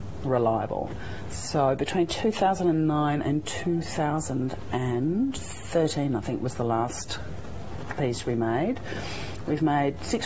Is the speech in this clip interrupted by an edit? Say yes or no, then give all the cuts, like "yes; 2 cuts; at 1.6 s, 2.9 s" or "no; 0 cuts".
no; 0 cuts